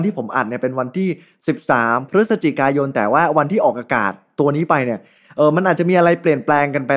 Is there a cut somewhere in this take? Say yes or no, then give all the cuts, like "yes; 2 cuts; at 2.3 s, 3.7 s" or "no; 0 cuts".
no; 0 cuts